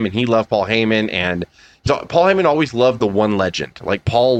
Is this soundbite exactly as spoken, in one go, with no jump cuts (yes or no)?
no